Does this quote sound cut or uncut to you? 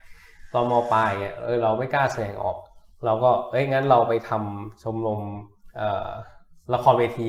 uncut